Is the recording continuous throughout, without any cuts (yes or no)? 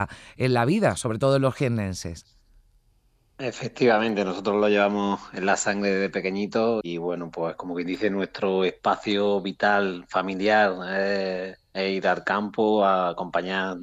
no